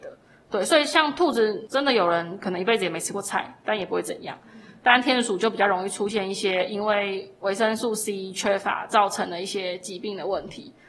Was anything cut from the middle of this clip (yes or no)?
no